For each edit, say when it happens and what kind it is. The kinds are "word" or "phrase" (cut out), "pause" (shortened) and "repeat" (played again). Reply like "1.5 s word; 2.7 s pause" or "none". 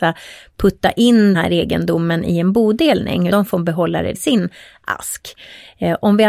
1.3 s word; 3.3 s word; 4.1 s word